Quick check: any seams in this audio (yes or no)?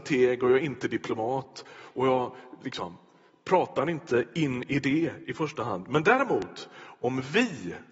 no